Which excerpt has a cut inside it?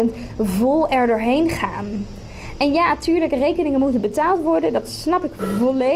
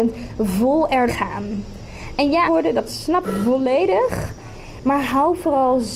second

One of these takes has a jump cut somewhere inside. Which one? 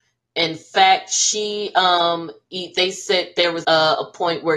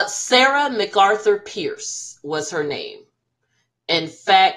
first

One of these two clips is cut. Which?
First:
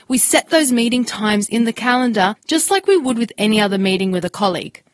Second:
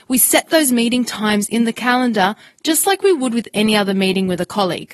first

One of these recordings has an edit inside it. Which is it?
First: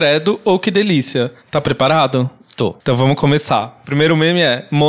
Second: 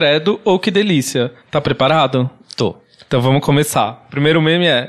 first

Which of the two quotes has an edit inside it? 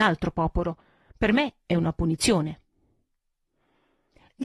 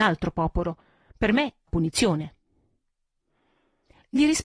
second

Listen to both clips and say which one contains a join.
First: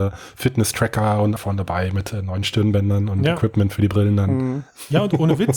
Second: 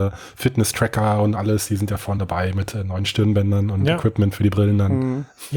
first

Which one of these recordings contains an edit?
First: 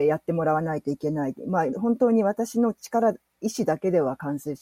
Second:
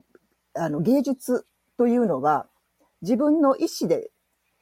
first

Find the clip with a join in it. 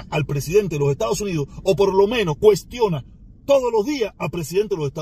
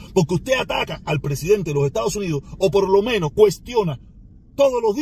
first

